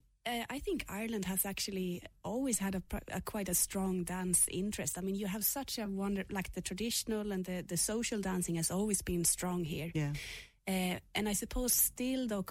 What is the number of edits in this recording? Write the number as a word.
zero